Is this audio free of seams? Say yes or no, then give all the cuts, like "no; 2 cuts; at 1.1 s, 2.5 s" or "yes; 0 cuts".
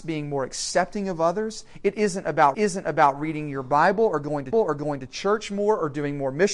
no; 2 cuts; at 2.5 s, 4.5 s